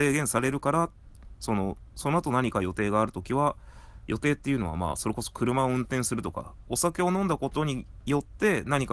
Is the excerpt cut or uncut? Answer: uncut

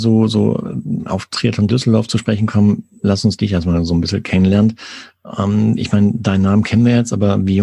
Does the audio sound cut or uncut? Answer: cut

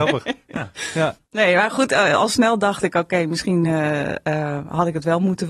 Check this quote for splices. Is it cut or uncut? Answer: uncut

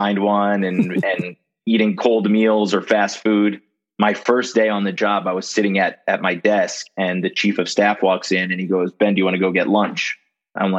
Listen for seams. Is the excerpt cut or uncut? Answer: uncut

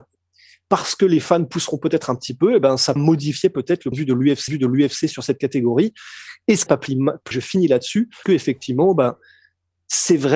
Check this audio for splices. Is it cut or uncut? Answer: cut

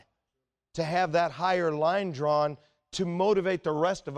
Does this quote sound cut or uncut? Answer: uncut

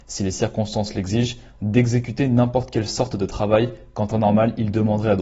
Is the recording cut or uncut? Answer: uncut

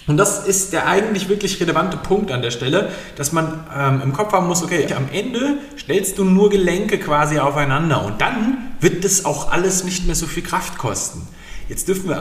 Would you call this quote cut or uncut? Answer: cut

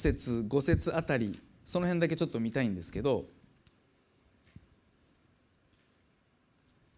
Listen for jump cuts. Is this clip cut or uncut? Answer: uncut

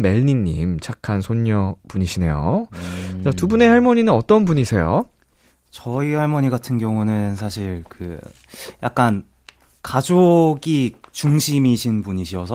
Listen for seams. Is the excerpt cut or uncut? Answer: uncut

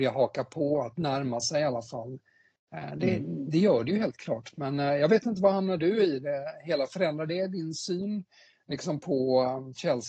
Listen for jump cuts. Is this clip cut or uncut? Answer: uncut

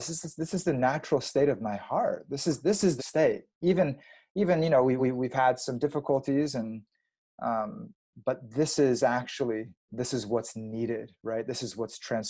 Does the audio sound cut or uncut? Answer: cut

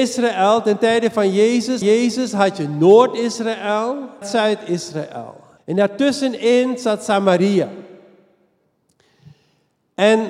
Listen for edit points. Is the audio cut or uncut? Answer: cut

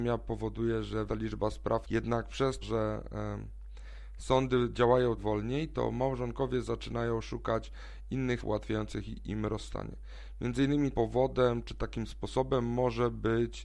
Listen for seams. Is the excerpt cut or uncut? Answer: cut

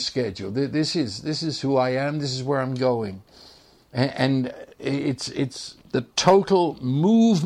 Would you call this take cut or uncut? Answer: cut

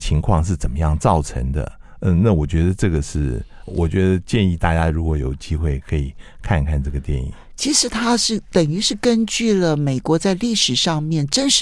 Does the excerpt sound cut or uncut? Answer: cut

